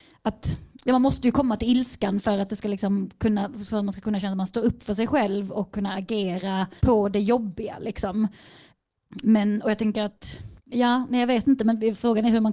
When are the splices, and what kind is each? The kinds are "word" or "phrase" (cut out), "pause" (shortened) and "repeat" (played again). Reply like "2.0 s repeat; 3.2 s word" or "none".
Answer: 6.8 s pause; 10.6 s pause